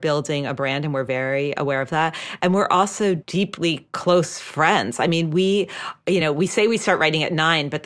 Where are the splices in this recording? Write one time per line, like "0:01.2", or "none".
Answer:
none